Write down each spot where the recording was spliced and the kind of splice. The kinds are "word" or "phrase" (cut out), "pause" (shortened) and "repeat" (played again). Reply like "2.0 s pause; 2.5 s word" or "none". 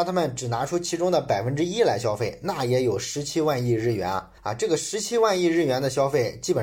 4.4 s pause